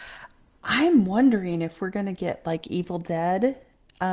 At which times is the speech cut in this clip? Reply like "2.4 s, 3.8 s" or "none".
none